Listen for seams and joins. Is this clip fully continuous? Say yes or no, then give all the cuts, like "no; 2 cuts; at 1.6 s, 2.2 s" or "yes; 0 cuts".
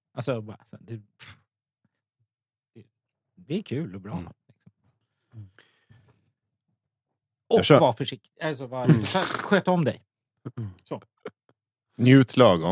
yes; 0 cuts